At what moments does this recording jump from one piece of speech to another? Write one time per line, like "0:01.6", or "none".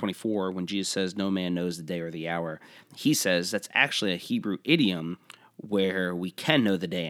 0:02.9